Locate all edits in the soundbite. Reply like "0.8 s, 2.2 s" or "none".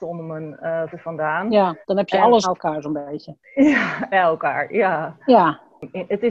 0.9 s, 1.8 s, 2.4 s, 4.1 s, 5.2 s